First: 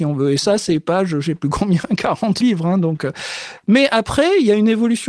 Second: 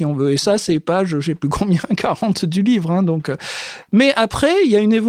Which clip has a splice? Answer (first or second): first